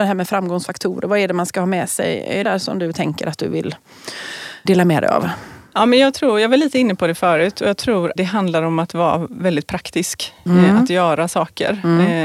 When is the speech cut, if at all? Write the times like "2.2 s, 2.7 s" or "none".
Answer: 2.4 s, 4.6 s, 8.2 s